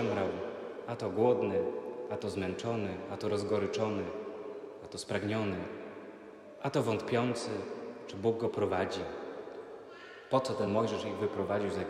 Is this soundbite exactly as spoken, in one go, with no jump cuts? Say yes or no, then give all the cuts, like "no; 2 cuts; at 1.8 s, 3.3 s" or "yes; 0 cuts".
yes; 0 cuts